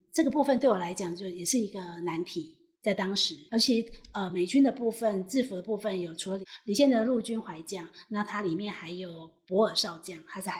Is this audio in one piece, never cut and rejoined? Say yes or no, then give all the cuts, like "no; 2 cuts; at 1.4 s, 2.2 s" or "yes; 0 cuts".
no; 1 cut; at 3.5 s